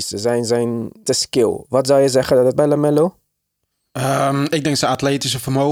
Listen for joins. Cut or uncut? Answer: cut